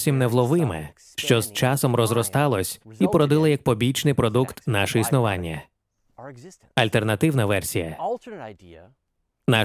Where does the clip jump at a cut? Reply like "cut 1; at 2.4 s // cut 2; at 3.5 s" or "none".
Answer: none